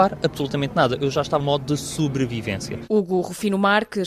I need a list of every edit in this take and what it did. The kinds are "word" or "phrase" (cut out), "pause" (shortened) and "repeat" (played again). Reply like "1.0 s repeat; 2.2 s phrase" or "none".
1.4 s word